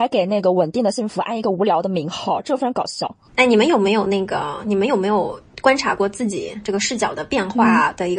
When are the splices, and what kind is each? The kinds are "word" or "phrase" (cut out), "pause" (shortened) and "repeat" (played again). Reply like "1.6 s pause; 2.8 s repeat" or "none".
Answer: 3.3 s pause